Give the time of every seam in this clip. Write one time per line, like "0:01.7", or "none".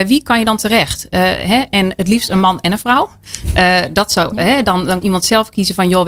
0:05.0